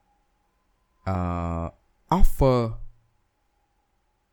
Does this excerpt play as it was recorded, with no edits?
yes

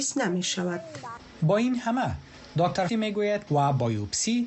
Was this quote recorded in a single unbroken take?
no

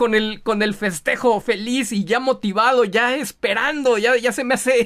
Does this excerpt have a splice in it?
yes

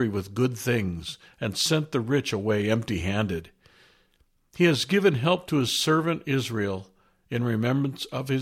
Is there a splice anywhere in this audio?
no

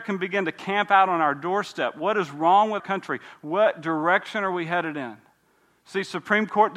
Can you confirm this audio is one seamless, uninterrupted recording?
no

